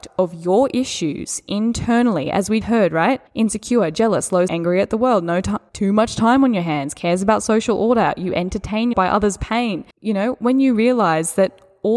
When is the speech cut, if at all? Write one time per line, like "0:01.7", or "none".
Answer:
0:02.6
0:03.3
0:04.5
0:05.7
0:08.9
0:09.9